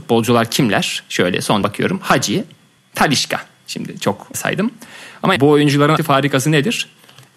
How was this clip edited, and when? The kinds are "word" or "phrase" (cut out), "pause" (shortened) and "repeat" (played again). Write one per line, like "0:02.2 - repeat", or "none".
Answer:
0:01.6 - word
0:02.8 - word
0:04.3 - word
0:05.4 - word
0:06.0 - word